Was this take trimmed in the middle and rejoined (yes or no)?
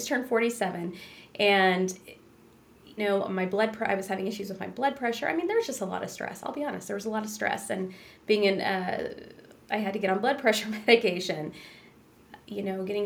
yes